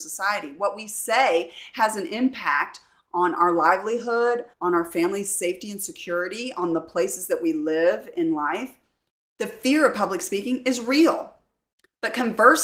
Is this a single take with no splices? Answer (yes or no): no